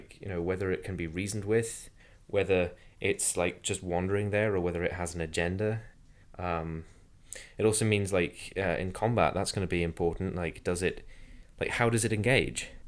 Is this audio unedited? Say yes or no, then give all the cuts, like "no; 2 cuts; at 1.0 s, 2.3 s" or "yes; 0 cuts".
yes; 0 cuts